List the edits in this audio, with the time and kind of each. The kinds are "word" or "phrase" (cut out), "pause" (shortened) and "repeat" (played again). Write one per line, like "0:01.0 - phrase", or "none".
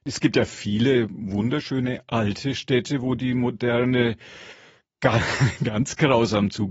none

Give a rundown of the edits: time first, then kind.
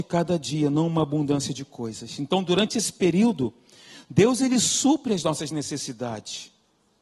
none

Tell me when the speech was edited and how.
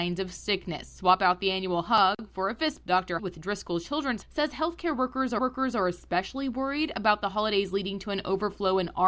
0:02.8 - word
0:03.2 - phrase
0:04.2 - word
0:05.4 - repeat

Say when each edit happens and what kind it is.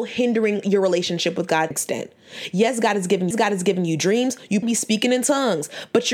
0:01.7 - phrase
0:03.3 - repeat
0:04.6 - word

